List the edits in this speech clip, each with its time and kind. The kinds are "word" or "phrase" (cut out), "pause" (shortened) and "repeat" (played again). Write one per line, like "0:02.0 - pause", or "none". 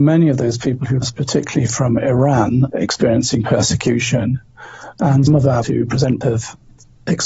0:01.0 - word
0:02.7 - word
0:05.3 - word
0:05.6 - word
0:06.2 - word

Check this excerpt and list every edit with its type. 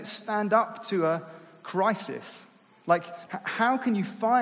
0:03.3 - word

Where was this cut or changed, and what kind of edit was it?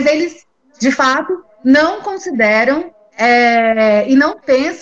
none

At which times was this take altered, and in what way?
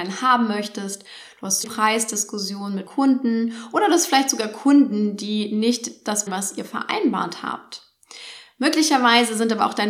0:01.6 - word
0:02.9 - word
0:06.3 - word

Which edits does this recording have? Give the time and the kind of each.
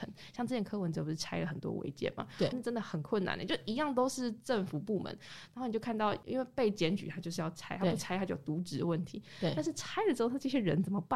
0:02.5 - word

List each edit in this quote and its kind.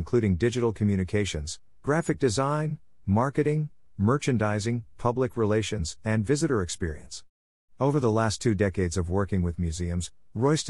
none

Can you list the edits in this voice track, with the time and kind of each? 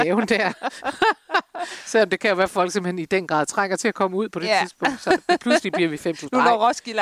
none

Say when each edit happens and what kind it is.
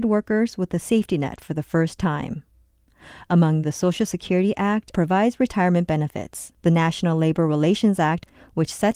0:03.6 - phrase
0:04.9 - word
0:06.6 - pause

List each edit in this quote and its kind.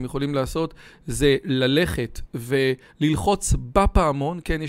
none

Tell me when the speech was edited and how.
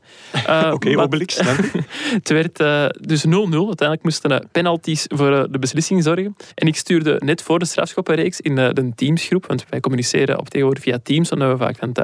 0:06.5 - pause
0:09.6 - word
0:10.5 - word

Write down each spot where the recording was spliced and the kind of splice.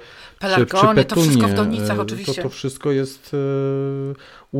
none

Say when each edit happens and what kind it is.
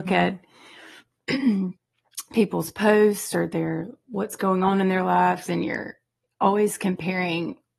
0:01.8 - pause
0:06.2 - pause

